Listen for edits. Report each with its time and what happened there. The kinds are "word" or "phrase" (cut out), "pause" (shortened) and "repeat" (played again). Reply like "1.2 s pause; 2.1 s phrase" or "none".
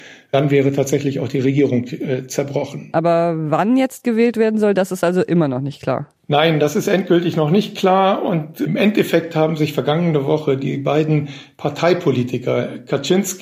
none